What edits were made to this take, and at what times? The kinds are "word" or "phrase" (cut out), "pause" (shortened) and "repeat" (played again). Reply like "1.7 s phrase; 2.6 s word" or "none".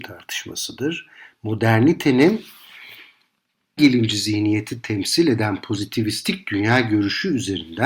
3.8 s phrase